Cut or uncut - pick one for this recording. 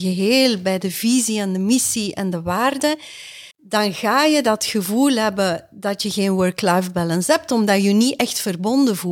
cut